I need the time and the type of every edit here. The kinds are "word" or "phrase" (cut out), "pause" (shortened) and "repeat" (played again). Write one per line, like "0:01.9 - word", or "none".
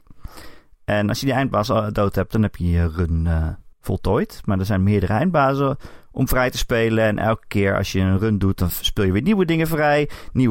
0:03.7 - pause